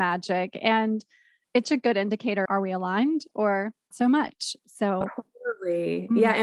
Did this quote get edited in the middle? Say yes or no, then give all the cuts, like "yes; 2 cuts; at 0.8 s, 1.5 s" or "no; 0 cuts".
yes; 3 cuts; at 1.6 s, 2.5 s, 3.9 s